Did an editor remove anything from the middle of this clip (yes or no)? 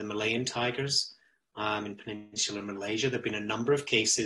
no